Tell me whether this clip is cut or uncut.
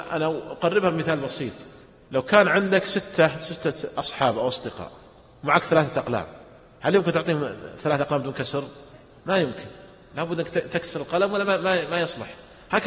uncut